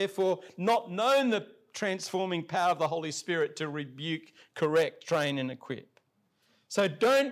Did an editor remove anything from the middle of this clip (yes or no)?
no